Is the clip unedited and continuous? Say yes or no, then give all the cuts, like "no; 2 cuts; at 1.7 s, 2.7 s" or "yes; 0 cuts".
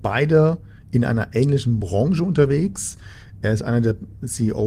yes; 0 cuts